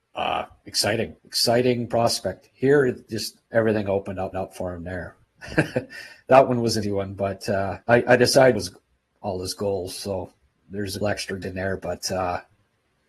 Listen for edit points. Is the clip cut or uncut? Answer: cut